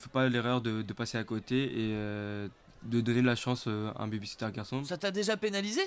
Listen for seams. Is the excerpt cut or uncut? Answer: uncut